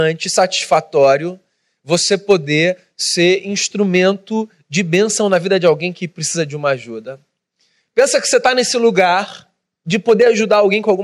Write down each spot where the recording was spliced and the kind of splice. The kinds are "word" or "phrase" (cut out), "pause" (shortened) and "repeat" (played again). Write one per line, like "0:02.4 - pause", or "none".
none